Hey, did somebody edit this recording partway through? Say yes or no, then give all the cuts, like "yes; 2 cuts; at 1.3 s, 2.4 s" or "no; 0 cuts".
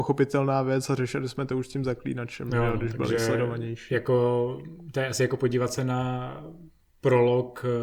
no; 0 cuts